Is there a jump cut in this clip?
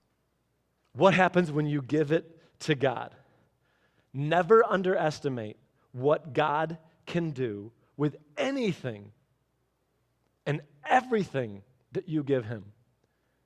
no; 0 cuts

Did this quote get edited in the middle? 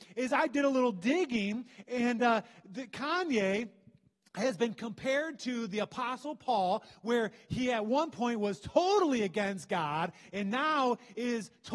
no; 0 cuts

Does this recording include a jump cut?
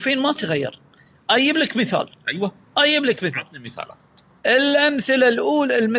no; 0 cuts

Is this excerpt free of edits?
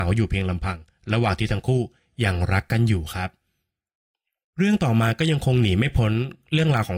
yes; 0 cuts

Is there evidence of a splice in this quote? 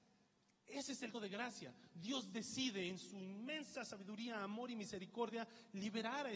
yes; 1 cut; at 1.1 s

